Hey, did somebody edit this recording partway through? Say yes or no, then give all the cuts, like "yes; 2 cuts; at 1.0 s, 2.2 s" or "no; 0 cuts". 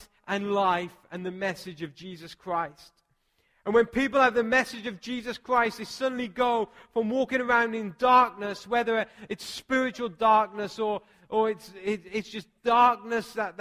no; 0 cuts